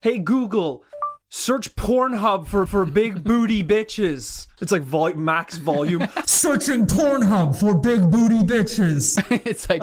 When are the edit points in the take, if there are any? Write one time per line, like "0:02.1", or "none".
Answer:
0:01.2
0:02.7